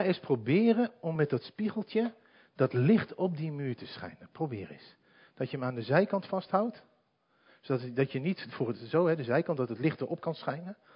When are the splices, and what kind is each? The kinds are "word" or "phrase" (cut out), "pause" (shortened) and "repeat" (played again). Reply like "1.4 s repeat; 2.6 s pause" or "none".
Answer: none